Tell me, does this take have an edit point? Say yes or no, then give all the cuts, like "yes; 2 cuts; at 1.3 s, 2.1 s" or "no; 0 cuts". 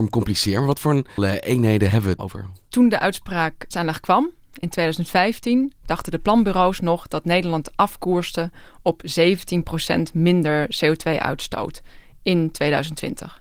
yes; 3 cuts; at 1.2 s, 2.2 s, 3.7 s